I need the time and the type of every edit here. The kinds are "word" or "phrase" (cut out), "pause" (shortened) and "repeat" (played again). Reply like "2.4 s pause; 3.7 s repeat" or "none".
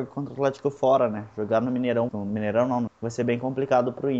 2.1 s word; 2.9 s word